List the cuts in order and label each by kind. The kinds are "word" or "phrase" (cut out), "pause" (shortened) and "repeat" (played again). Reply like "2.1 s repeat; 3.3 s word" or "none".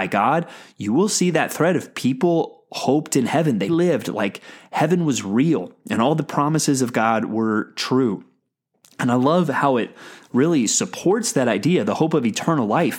3.7 s word